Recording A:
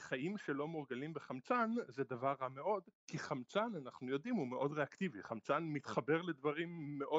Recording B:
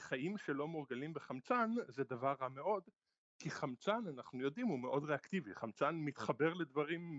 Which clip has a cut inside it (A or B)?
A